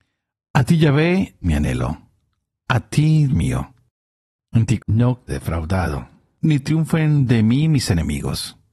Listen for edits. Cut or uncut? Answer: cut